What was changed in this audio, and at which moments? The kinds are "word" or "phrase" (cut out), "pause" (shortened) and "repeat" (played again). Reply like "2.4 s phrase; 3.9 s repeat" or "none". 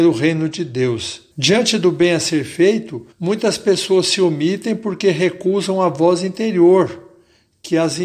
1.3 s pause; 3.1 s pause